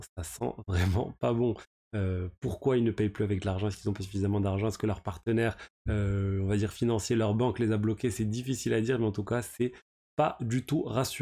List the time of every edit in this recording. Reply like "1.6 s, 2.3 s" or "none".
none